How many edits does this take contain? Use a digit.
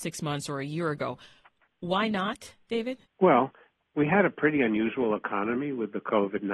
1